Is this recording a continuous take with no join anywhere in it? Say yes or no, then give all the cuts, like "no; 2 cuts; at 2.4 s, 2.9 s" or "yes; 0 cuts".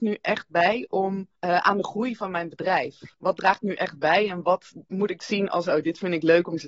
no; 2 cuts; at 1.4 s, 3.1 s